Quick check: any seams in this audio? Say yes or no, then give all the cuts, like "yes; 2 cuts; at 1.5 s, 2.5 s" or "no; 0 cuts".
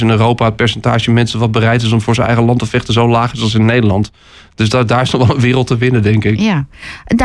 no; 0 cuts